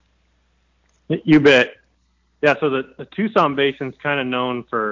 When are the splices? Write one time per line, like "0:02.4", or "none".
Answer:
none